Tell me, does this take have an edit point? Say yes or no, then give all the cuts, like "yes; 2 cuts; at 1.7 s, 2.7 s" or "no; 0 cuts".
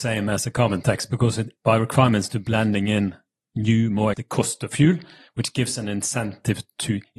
yes; 2 cuts; at 1.6 s, 4.1 s